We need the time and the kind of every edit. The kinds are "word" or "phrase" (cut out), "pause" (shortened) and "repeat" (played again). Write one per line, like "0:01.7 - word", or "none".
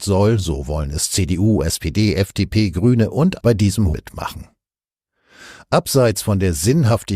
0:03.4 - word
0:03.9 - word